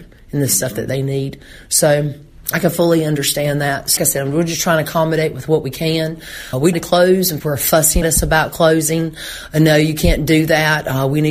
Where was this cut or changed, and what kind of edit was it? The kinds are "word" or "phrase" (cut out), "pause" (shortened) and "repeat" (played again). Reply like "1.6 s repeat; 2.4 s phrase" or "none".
4.0 s word; 6.7 s word; 7.4 s word; 8.0 s word

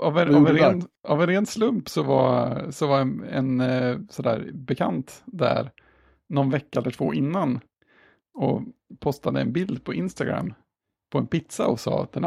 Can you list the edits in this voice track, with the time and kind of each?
none

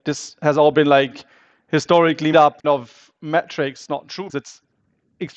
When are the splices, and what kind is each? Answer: 2.3 s word; 2.6 s word; 3.9 s phrase; 4.3 s word

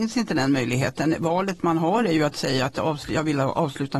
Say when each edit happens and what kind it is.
none

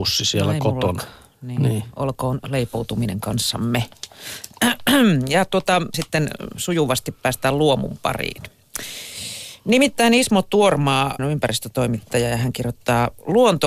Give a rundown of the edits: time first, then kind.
5.9 s word; 11.2 s word

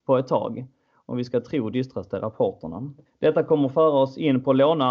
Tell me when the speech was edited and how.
1.7 s word; 3.1 s pause

